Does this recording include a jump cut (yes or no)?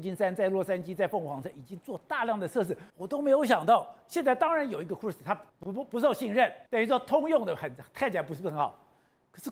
yes